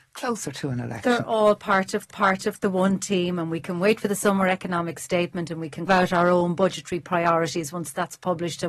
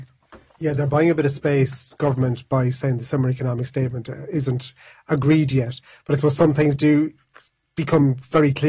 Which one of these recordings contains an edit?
first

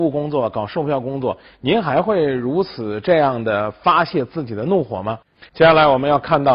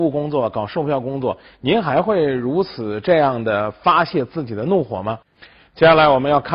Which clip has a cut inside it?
first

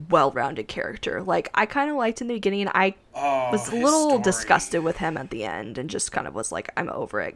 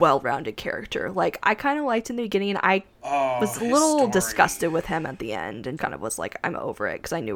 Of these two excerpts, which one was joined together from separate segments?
second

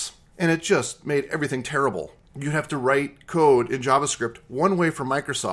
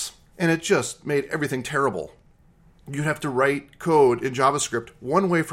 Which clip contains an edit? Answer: first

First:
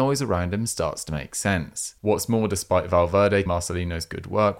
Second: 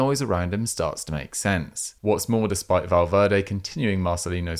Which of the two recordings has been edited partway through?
first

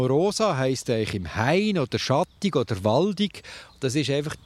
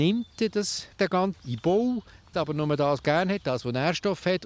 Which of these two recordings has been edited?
second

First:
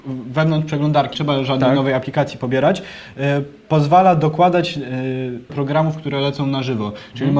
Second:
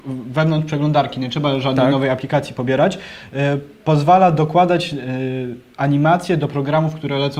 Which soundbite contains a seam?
first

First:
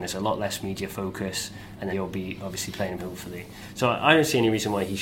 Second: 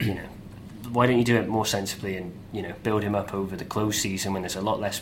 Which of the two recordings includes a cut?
first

